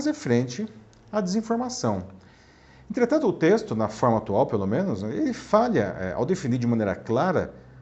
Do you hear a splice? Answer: no; 0 cuts

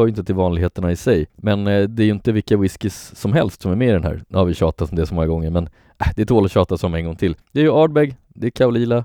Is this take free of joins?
no; 1 cut; at 7.4 s

